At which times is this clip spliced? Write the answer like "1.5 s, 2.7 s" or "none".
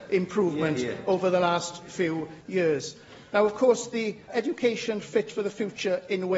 4.3 s